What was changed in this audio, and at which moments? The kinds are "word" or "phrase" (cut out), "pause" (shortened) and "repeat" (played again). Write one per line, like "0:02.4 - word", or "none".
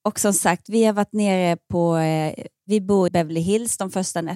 0:03.1 - word